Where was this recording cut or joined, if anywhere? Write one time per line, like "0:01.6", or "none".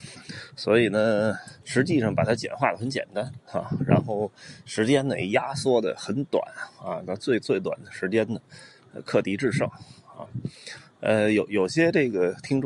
0:01.6